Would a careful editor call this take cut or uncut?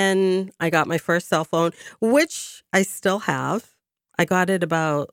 uncut